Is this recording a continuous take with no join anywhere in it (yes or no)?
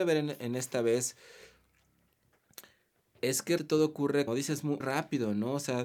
no